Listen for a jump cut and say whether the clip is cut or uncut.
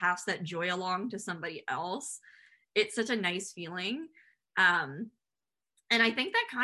uncut